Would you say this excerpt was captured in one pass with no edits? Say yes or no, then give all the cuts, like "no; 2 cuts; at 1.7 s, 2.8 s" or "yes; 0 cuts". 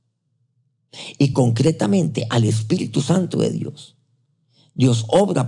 yes; 0 cuts